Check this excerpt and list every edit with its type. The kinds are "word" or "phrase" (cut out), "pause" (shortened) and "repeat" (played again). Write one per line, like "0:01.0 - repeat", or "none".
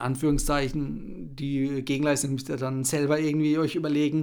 none